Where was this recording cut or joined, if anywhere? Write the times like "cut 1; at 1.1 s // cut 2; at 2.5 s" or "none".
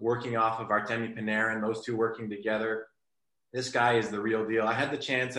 none